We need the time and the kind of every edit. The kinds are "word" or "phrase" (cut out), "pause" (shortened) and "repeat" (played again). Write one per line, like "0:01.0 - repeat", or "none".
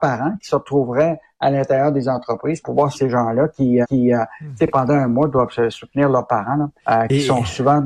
0:02.6 - word
0:02.9 - word
0:03.8 - repeat
0:06.8 - pause